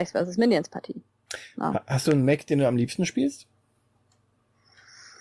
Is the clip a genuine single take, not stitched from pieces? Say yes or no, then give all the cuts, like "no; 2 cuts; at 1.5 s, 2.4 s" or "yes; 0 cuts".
yes; 0 cuts